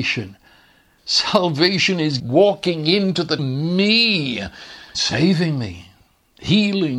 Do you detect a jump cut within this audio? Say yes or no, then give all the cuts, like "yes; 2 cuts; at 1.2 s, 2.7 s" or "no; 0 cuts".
yes; 3 cuts; at 2.2 s, 3.4 s, 4.9 s